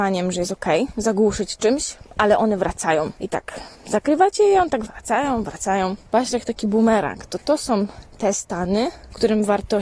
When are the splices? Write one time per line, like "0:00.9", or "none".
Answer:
0:03.7
0:04.9